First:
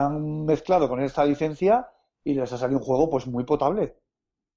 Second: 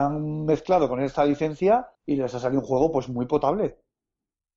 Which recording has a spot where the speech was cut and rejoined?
second; 1 cut; at 1.9 s

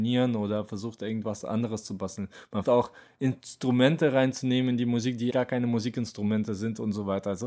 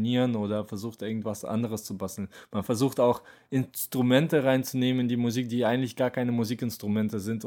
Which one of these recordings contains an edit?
first; 2 cuts; at 2.6 s, 5.3 s

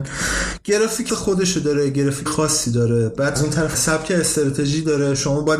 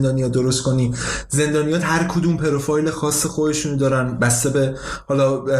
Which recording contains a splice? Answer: first; 4 cuts; at 1.1 s, 2.3 s, 3.4 s, 3.7 s

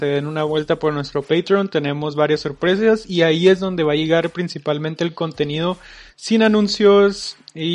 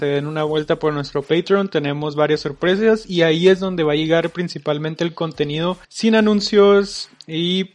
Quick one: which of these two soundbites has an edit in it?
second; 1 cut; at 5.8 s

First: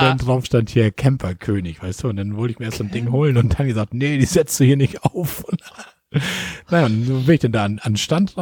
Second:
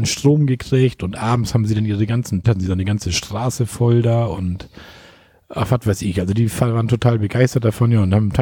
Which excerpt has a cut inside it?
second; 1 cut; at 2.4 s

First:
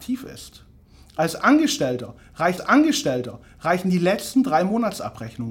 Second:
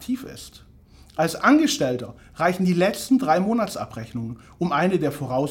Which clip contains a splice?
first; 1 cut; at 2.6 s

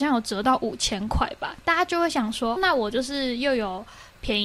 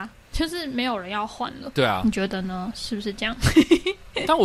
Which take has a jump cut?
first; 1 cut; at 2.6 s

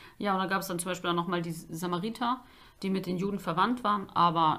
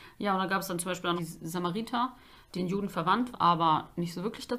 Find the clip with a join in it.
second; 3 cuts; at 1.2 s, 2.5 s, 3.3 s

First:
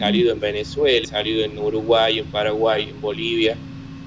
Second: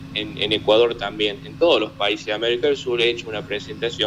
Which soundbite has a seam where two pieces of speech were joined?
first; 1 cut; at 1.0 s

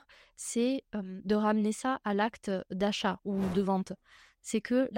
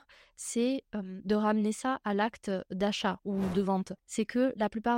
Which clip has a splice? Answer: second; 1 cut; at 4.0 s

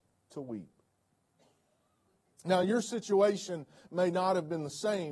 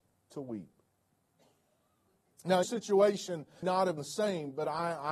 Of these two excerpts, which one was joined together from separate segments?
second; 3 cuts; at 2.6 s, 3.6 s, 4.0 s

